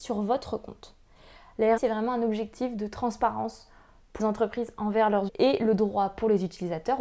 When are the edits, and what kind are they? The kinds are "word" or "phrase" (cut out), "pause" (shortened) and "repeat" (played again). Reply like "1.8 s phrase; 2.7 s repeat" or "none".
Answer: 1.8 s word; 4.2 s word; 5.3 s word